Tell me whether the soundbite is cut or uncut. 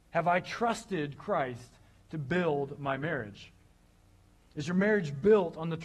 uncut